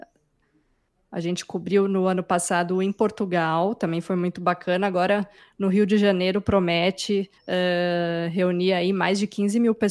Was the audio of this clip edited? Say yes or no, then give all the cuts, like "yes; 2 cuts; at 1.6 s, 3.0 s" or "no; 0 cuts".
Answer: yes; 1 cut; at 7.4 s